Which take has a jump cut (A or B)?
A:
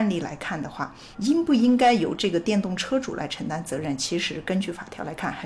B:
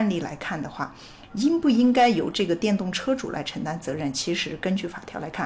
A